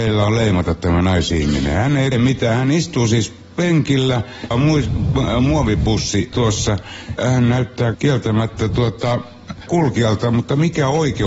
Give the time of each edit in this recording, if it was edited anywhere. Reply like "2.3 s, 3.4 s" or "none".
2.1 s, 4.5 s, 6.3 s, 7.2 s, 7.9 s, 9.7 s